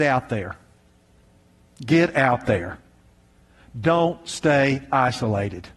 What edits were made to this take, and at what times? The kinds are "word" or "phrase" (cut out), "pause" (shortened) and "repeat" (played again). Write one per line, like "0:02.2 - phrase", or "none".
none